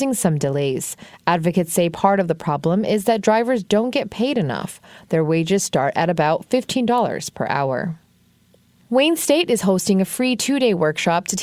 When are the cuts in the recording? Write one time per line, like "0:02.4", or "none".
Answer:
none